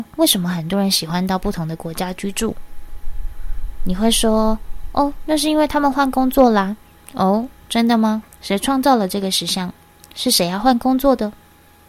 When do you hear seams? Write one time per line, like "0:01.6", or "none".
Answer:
0:06.8
0:08.3
0:09.9